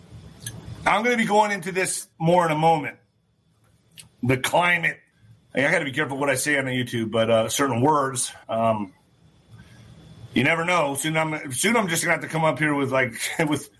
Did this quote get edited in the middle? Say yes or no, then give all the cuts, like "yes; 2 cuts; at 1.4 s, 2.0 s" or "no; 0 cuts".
yes; 3 cuts; at 2.1 s, 5.1 s, 8.4 s